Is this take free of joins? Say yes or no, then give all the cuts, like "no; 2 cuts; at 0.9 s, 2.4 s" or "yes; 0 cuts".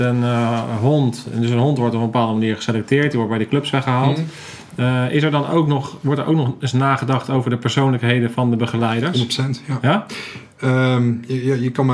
yes; 0 cuts